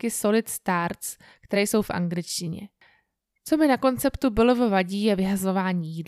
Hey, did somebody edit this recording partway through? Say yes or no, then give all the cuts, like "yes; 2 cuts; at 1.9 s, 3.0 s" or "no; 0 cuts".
no; 0 cuts